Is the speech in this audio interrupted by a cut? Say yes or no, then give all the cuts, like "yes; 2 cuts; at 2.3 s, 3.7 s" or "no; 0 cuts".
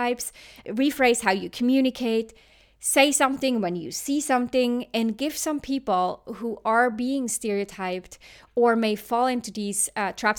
no; 0 cuts